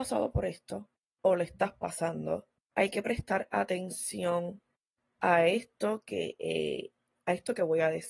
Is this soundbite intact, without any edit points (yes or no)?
no